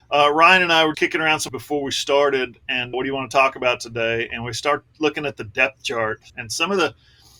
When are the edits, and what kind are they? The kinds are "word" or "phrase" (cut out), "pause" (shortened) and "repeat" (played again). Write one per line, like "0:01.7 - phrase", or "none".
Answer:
0:00.9 - word
0:01.5 - word
0:02.9 - word
0:06.3 - pause